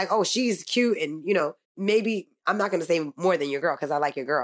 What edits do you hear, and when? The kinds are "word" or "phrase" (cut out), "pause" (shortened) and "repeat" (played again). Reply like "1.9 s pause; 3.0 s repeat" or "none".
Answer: 1.6 s pause